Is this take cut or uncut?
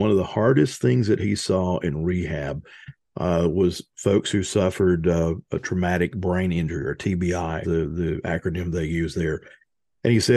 cut